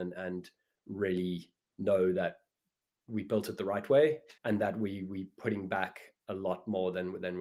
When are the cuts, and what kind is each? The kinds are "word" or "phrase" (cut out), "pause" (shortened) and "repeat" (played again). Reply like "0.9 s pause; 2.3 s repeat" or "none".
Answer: 4.4 s pause